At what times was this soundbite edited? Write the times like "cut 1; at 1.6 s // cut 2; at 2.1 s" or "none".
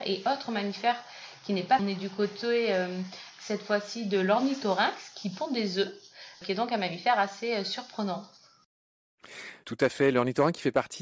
cut 1; at 1.8 s

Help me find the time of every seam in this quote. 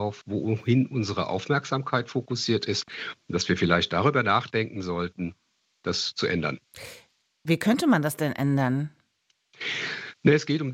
none

